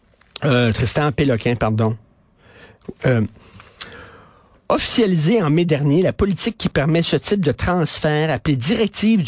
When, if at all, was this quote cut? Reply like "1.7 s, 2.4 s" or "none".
none